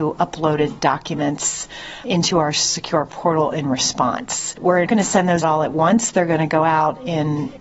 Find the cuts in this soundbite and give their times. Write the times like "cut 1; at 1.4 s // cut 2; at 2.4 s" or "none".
cut 1; at 4.9 s // cut 2; at 5.4 s